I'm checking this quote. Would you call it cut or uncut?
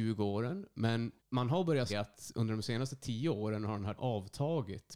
cut